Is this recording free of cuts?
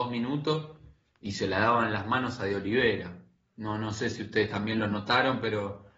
yes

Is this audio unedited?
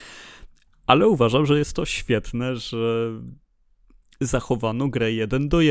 yes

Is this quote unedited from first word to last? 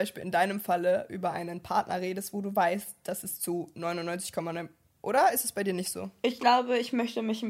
yes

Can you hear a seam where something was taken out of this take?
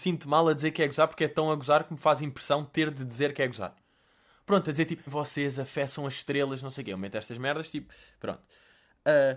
yes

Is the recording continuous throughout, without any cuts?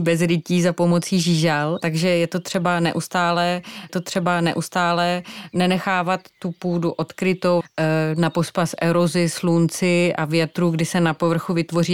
no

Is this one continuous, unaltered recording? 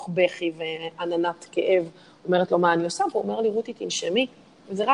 yes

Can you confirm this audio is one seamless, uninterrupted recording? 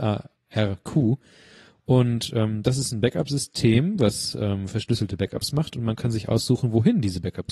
yes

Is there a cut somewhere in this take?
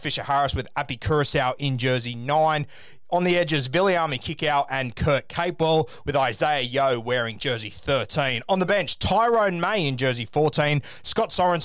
no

